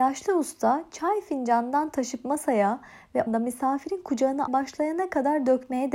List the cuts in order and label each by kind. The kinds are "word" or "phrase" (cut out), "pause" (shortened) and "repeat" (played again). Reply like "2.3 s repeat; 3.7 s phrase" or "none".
3.3 s word; 4.5 s word